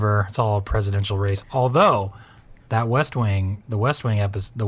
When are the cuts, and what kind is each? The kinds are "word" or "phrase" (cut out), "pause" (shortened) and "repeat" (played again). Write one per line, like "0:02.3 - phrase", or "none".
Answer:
0:02.6 - pause